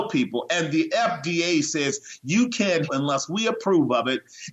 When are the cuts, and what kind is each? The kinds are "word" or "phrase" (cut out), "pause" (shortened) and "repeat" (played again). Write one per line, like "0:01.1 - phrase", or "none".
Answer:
0:02.9 - word